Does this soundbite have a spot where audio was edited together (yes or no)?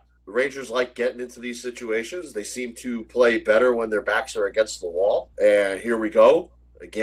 yes